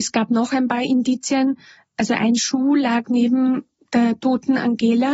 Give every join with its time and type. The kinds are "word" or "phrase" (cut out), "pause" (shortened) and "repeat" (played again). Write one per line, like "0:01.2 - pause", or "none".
none